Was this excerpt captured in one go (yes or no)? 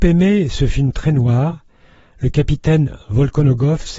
yes